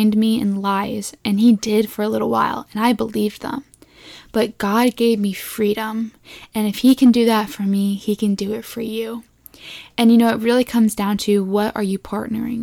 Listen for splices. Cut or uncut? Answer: uncut